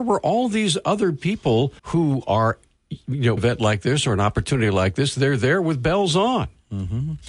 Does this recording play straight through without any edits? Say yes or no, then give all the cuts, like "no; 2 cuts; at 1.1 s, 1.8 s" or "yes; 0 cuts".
no; 2 cuts; at 1.8 s, 3.4 s